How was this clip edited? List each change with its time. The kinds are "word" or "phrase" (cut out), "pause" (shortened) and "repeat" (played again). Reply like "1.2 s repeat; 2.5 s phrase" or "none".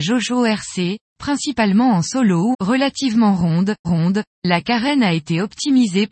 2.5 s phrase; 3.8 s repeat

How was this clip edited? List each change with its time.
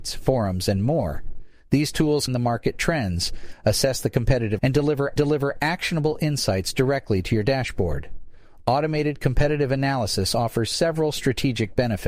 2.3 s phrase; 4.6 s word; 5.2 s repeat

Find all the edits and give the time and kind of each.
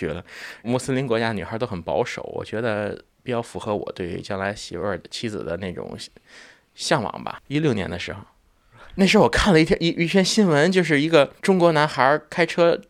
7.5 s pause; 11.4 s pause

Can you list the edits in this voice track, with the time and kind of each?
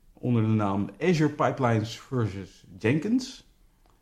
none

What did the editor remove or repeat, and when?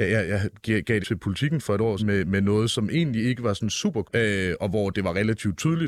1.0 s word; 2.0 s word; 4.0 s word

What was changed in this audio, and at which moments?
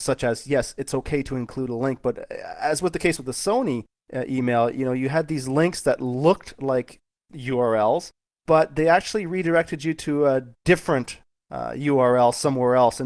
none

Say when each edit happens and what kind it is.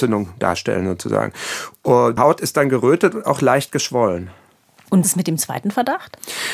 2.2 s word; 3.2 s word; 5.0 s word

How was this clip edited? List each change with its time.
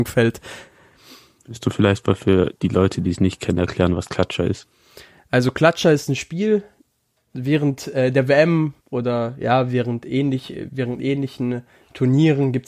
8.8 s pause

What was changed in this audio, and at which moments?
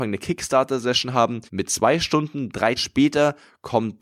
1.5 s pause; 2.8 s word

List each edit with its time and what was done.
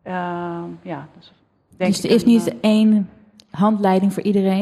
none

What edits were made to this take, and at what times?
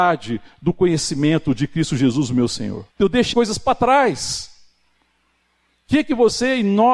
2.9 s pause; 3.3 s word

